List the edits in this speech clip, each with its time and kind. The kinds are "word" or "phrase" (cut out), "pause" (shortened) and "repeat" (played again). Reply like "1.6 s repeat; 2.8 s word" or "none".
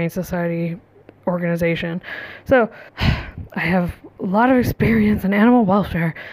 2.9 s pause